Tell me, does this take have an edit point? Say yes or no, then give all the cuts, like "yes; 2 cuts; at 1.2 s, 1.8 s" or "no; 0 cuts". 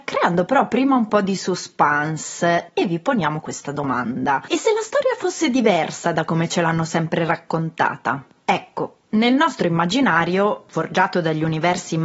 no; 0 cuts